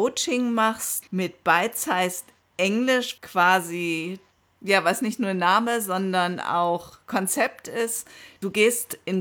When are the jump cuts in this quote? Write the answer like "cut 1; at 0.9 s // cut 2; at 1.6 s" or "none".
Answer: cut 1; at 1.1 s // cut 2; at 3.2 s